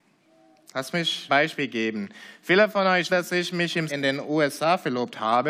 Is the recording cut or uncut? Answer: cut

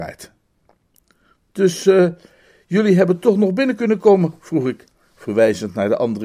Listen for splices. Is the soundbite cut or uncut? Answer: uncut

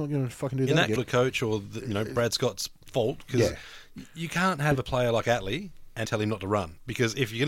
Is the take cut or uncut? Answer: cut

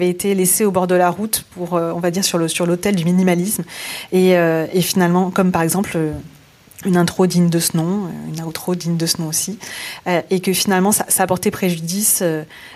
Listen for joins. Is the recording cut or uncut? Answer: uncut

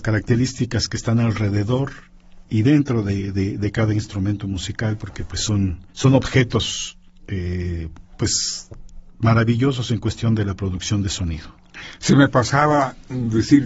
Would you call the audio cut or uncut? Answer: cut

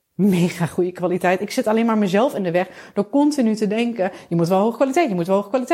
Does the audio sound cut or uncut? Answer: uncut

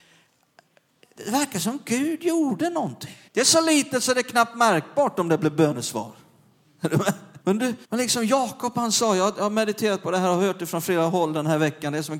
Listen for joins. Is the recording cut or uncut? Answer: cut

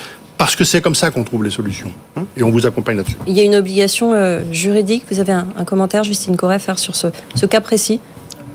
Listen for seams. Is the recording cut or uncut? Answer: uncut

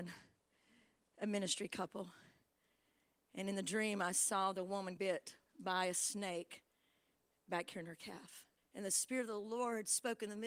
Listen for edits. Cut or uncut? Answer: cut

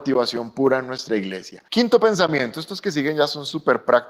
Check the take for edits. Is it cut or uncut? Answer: cut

